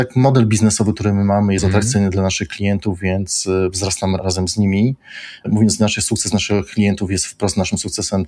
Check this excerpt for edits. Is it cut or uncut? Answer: cut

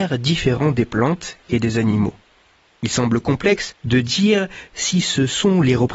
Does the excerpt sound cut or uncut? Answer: uncut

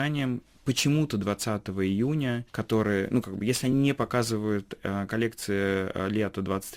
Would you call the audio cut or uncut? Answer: uncut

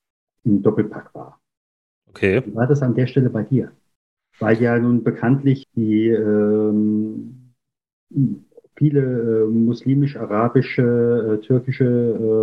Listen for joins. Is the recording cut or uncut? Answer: cut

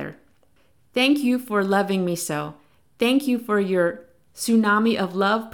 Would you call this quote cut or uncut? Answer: uncut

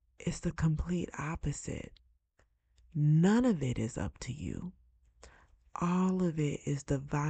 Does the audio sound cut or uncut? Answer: uncut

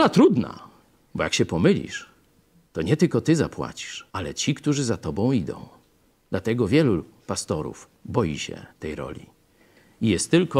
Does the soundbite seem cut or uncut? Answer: cut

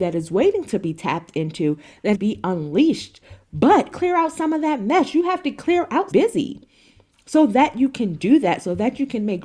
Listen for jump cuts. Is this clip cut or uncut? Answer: cut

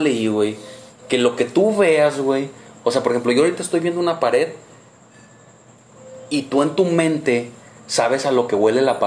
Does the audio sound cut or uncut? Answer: uncut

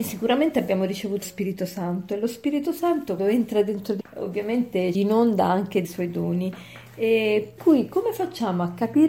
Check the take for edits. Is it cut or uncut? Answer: cut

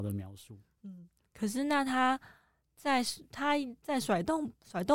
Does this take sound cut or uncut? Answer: uncut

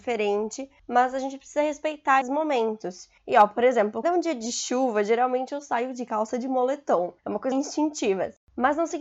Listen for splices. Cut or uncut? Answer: cut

